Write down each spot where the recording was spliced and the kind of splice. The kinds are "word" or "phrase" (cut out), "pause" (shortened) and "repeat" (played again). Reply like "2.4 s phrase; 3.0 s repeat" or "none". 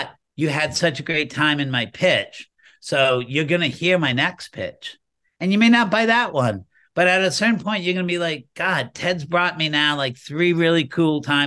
none